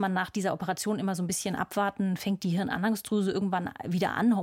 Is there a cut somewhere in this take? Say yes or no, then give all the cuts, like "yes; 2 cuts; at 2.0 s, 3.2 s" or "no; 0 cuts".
no; 0 cuts